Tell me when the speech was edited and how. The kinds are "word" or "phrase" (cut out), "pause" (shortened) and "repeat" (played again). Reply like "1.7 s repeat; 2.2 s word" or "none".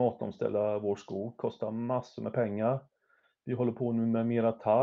none

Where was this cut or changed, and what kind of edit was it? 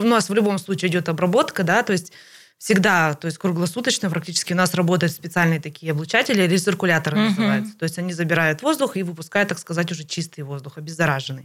none

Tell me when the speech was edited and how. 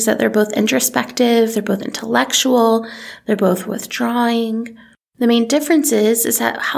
none

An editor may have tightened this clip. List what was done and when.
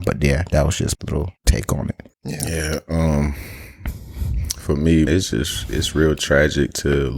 0.9 s word; 1.4 s pause; 2.1 s pause; 5.1 s word

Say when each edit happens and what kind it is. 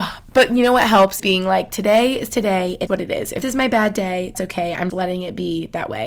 1.2 s word; 2.9 s word; 3.4 s word; 4.3 s word; 4.9 s word

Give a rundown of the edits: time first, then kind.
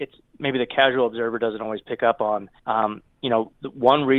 2.6 s pause

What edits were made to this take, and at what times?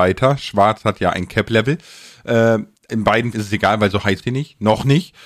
2.9 s word; 3.3 s word; 4.2 s word

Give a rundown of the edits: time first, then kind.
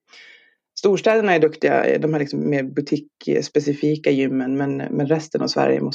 none

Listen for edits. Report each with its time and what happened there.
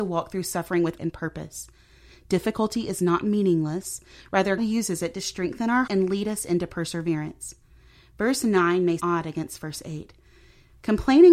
1.0 s word; 4.6 s word; 5.9 s word; 9.0 s word

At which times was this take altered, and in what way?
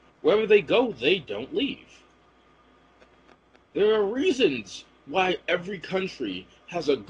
none

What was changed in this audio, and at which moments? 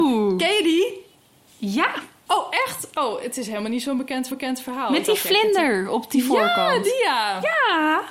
4.3 s repeat

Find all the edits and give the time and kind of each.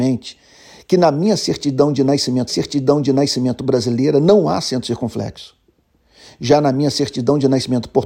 2.5 s repeat

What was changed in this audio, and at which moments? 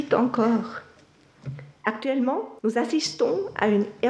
2.6 s pause

